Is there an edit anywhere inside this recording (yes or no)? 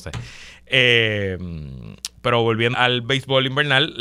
yes